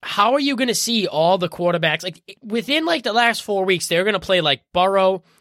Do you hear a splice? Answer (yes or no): no